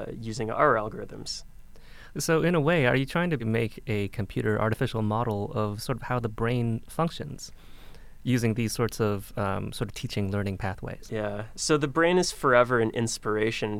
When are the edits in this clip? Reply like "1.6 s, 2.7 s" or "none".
3.4 s